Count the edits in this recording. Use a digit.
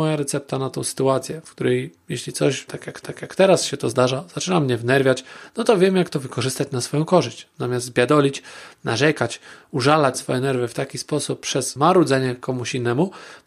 2